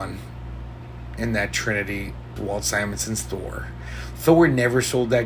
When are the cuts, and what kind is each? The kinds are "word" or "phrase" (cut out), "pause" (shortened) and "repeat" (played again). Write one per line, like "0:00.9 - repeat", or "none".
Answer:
0:02.4 - word